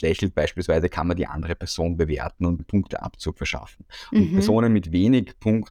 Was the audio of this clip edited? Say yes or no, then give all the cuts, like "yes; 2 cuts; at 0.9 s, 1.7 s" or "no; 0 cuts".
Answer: yes; 1 cut; at 2.6 s